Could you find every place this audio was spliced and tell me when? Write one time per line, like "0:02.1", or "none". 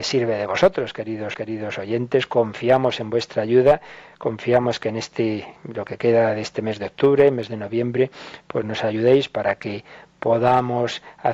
0:01.3